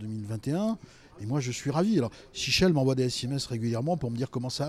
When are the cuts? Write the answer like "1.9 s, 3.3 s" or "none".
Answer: none